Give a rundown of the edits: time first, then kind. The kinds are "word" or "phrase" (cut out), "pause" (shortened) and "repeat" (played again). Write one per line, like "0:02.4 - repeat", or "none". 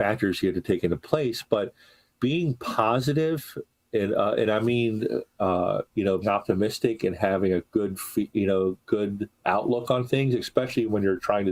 0:02.2 - word
0:06.2 - word
0:09.4 - word